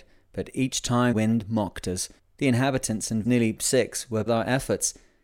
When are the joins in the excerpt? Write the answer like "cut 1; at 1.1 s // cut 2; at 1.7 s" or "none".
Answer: cut 1; at 1.1 s // cut 2; at 2.2 s // cut 3; at 3.2 s // cut 4; at 4.3 s